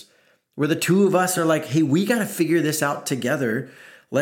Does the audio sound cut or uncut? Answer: uncut